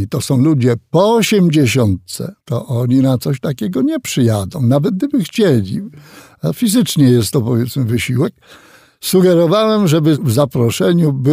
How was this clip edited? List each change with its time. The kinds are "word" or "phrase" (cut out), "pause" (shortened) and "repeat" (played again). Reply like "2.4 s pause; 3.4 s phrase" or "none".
2.4 s pause